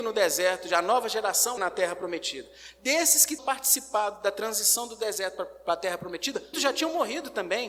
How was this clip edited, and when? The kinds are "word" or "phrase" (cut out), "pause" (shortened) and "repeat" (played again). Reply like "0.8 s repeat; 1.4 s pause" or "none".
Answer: 1.6 s word; 3.4 s word; 6.5 s word